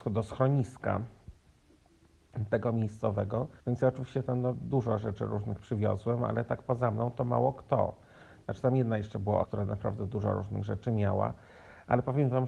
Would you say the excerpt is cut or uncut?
cut